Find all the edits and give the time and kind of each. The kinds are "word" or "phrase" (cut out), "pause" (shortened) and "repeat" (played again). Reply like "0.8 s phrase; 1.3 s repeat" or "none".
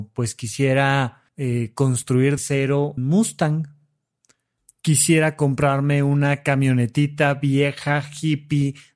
1.3 s pause; 2.4 s word; 3.0 s word